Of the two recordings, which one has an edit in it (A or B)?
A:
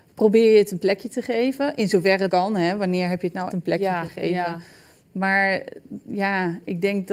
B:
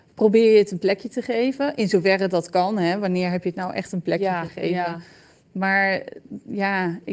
A